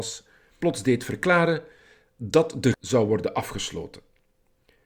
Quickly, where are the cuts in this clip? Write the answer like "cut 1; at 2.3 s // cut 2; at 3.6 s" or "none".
cut 1; at 2.7 s